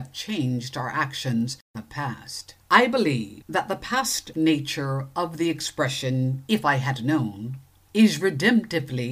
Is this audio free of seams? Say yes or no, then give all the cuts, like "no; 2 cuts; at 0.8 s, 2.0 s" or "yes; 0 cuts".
no; 3 cuts; at 1.7 s, 2.6 s, 4.3 s